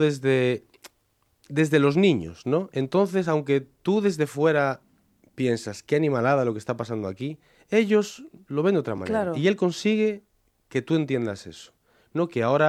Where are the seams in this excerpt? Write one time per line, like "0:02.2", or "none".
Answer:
none